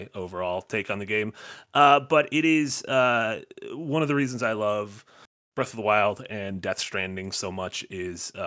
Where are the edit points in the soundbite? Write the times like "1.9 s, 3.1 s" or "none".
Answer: none

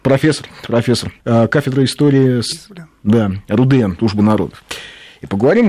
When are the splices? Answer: 1.2 s, 2.5 s, 4.0 s

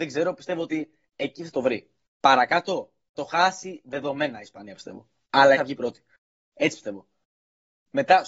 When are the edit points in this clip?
3.1 s, 5.5 s

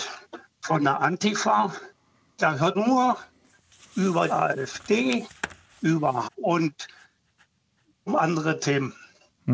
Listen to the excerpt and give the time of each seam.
2.7 s, 4.3 s, 6.2 s, 8.1 s

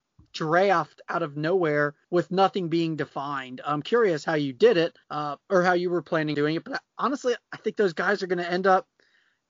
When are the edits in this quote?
2.0 s, 5.0 s, 6.3 s, 6.9 s

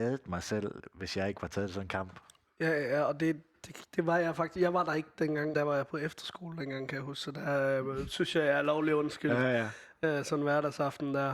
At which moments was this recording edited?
3.5 s, 5.5 s

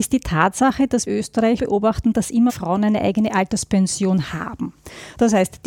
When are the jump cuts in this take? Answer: 1.1 s, 1.6 s, 2.5 s

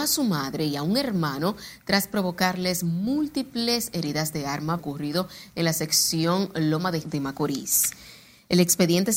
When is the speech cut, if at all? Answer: 4.8 s, 7.0 s

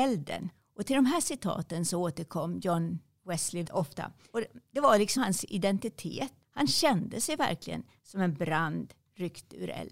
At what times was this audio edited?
3.6 s, 5.2 s, 6.4 s

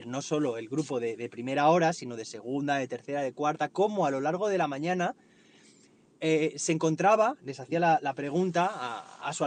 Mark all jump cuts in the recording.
none

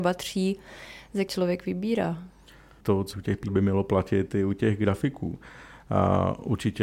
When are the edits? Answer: 1.3 s, 3.1 s, 3.5 s

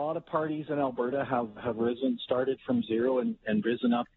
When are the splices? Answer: 1.6 s

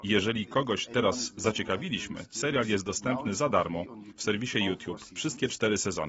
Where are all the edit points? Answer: none

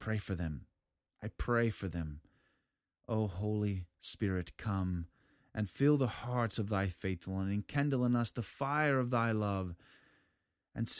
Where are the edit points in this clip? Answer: none

